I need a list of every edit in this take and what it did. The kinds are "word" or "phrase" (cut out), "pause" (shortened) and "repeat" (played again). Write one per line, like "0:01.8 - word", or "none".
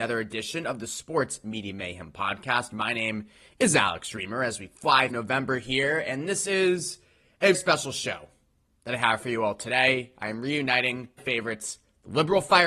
0:05.1 - word
0:07.5 - word
0:11.2 - phrase